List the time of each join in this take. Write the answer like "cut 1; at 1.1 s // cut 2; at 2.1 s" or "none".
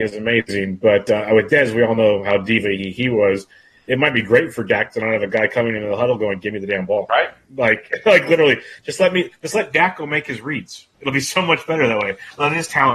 none